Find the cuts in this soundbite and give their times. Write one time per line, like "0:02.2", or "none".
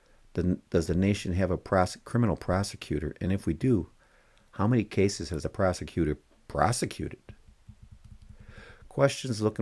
none